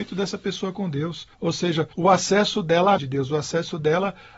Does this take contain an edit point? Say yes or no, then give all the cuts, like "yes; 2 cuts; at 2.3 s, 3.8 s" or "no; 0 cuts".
yes; 3 cuts; at 1.3 s, 1.9 s, 3.0 s